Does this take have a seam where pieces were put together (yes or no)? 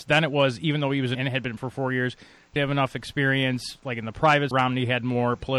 yes